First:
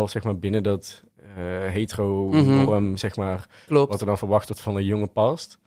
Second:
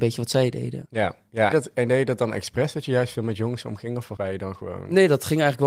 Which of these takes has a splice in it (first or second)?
second